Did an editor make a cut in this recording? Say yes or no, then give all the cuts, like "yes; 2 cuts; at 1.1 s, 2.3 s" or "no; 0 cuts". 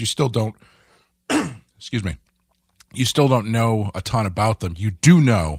no; 0 cuts